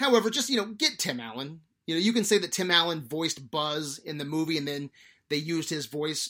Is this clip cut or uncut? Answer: uncut